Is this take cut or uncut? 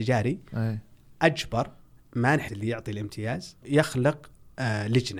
cut